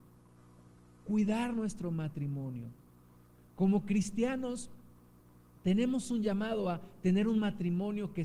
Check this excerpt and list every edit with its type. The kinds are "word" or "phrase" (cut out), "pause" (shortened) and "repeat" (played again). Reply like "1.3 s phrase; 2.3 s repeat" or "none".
none